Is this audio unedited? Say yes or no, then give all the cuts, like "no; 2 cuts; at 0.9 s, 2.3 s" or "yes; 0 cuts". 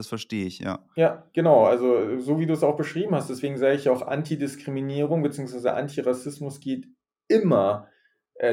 yes; 0 cuts